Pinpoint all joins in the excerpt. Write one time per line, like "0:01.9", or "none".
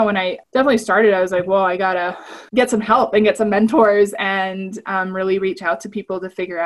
0:02.5